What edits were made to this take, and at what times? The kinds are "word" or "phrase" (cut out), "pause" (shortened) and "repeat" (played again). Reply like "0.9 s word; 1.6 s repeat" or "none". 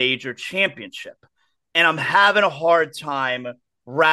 none